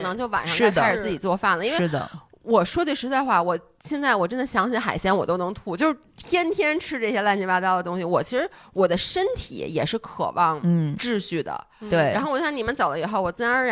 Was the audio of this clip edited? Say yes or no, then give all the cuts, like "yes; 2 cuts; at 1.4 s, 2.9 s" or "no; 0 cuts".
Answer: no; 0 cuts